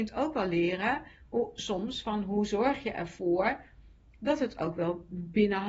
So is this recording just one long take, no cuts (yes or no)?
yes